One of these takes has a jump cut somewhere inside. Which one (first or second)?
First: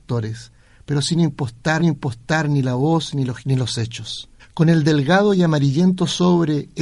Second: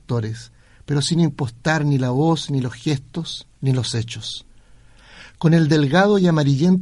first